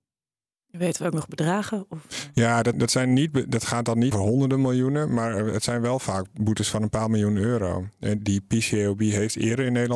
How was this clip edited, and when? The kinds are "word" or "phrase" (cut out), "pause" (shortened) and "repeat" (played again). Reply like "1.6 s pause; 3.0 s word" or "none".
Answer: 2.7 s word; 4.1 s word; 8.2 s word